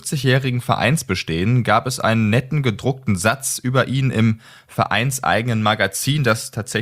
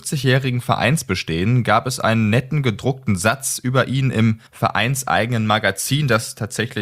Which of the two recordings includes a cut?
second; 1 cut; at 4.5 s

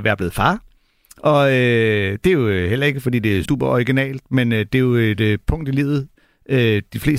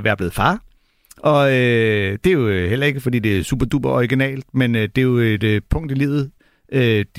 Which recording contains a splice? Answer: first; 1 cut; at 3.4 s

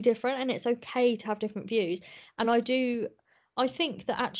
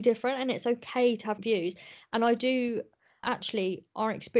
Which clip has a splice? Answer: second; 2 cuts; at 1.4 s, 3.2 s

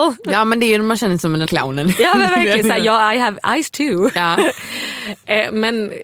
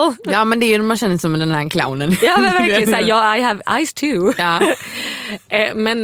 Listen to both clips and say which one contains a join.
first; 1 cut; at 1.5 s

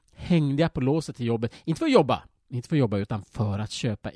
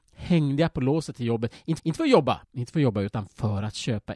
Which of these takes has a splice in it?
second; 2 cuts; at 1.8 s, 2.4 s

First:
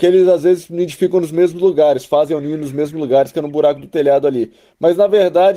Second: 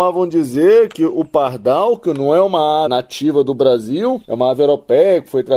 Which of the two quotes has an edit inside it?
second; 2 cuts; at 2.9 s, 4.2 s

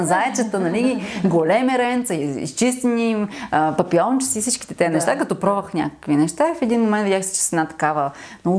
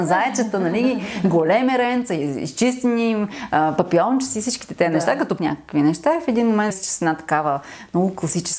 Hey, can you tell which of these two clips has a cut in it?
second; 2 cuts; at 5.4 s, 6.7 s

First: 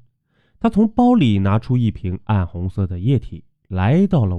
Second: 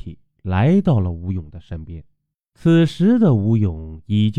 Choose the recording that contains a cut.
second; 1 cut; at 2.3 s

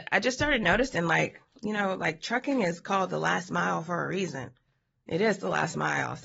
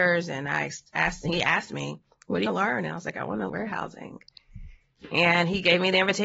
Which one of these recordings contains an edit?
second; 2 cuts; at 2.5 s, 3.5 s

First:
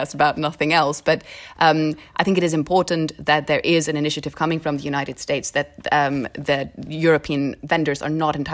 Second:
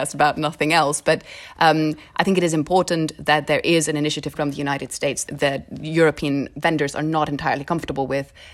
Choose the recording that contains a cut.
second; 2 cuts; at 4.3 s, 5.2 s

